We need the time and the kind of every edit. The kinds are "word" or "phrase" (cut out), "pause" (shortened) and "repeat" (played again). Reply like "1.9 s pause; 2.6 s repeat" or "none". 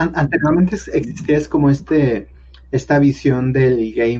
none